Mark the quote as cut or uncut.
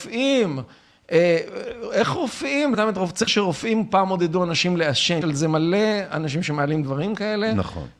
cut